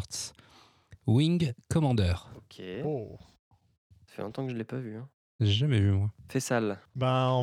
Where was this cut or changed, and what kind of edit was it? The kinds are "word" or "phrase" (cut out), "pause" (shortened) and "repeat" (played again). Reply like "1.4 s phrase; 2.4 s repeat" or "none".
none